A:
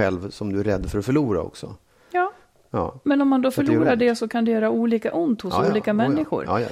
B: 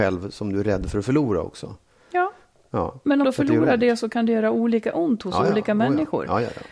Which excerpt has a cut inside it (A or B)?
B